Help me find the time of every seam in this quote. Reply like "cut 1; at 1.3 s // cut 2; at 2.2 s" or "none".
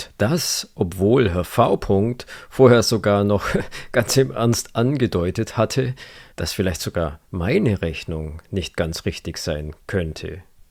cut 1; at 6.3 s